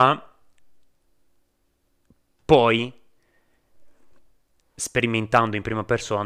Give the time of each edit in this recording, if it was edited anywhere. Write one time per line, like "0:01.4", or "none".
none